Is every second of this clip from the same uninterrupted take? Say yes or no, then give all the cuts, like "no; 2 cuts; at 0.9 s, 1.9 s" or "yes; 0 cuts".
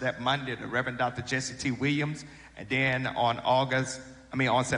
yes; 0 cuts